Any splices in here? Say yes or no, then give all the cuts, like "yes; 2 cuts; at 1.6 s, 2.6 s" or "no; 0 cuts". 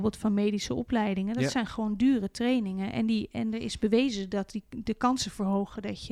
no; 0 cuts